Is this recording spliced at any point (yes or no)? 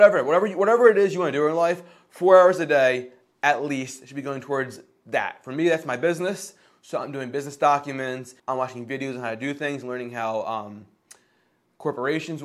yes